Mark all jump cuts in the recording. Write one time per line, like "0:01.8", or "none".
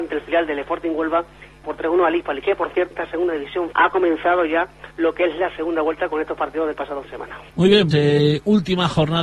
0:01.6
0:02.9
0:03.7
0:04.9
0:07.0
0:07.5
0:07.9